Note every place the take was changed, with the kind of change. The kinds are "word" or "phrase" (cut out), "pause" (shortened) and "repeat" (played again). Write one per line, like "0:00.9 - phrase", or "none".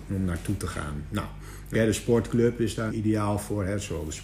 0:01.7 - word
0:02.9 - word